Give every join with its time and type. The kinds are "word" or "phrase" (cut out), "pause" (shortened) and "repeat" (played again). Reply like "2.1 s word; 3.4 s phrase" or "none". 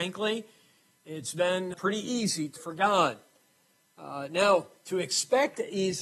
1.7 s word; 2.6 s word